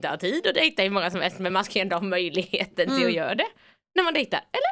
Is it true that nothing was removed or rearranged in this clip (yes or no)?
yes